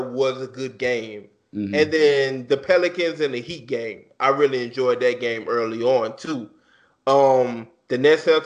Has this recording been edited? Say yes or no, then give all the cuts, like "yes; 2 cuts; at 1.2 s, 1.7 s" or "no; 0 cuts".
no; 0 cuts